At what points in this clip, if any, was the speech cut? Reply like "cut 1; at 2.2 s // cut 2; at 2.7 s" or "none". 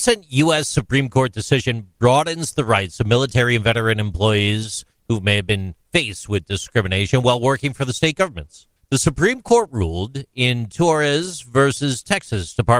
cut 1; at 5.8 s // cut 2; at 8.8 s